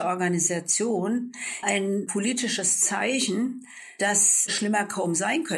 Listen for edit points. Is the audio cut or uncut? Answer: cut